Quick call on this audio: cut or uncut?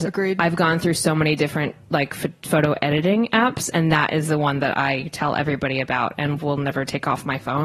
uncut